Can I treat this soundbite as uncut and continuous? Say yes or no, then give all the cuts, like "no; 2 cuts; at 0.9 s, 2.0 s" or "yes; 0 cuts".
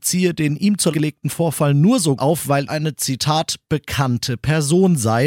no; 3 cuts; at 0.9 s, 2.2 s, 2.7 s